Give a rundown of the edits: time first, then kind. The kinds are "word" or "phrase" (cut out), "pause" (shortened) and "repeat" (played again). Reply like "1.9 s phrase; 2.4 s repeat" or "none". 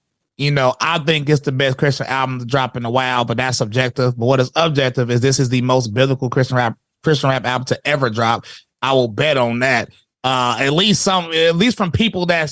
none